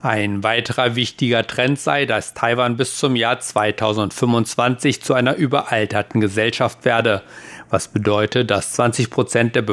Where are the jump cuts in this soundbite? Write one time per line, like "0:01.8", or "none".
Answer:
none